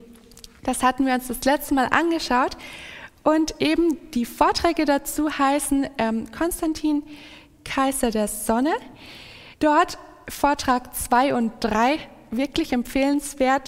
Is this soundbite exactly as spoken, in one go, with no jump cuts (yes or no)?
no